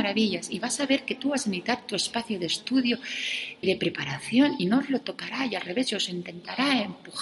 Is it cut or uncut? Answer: cut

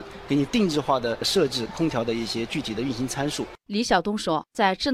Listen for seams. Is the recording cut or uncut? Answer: uncut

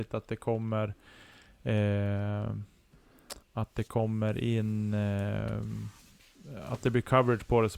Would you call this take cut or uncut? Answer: cut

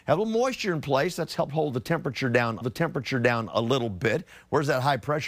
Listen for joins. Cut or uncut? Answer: cut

